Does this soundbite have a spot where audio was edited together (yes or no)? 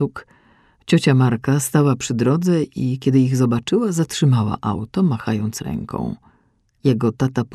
no